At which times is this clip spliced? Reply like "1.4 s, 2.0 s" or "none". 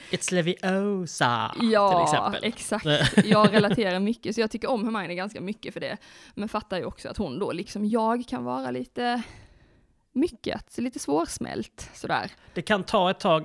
none